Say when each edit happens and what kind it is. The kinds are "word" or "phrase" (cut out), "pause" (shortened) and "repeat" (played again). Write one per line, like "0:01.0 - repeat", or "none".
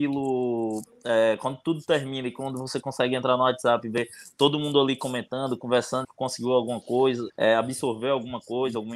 0:06.0 - word
0:07.3 - word